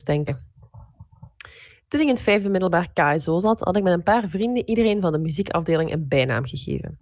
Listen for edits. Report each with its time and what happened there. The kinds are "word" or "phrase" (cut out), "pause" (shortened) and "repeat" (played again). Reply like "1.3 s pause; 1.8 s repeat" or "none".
none